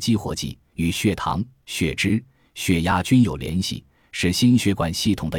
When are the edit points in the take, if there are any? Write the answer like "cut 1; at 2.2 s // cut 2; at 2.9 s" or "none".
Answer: none